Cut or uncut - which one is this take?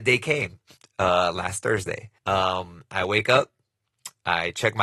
cut